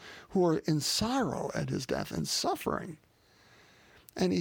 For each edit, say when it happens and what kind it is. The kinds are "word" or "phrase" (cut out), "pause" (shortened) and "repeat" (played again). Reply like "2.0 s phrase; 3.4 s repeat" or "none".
none